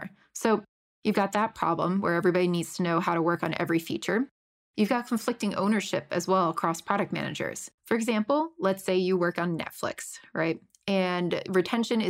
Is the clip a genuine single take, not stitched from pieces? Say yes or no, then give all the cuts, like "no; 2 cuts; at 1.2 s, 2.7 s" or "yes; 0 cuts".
no; 1 cut; at 7.8 s